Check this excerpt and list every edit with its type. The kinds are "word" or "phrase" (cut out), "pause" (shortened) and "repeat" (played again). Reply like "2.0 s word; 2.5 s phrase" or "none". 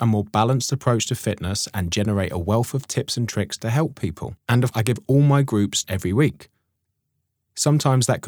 4.4 s pause; 4.7 s word; 5.8 s word